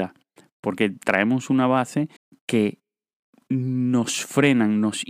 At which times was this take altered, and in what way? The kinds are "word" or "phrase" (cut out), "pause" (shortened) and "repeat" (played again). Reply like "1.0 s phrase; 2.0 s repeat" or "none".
2.2 s pause